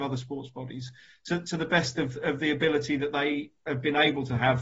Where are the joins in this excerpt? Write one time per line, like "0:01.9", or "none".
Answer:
none